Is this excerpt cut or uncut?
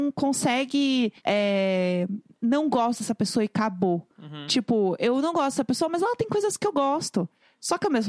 cut